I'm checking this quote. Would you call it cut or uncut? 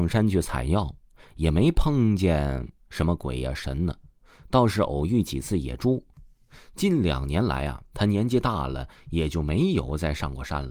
uncut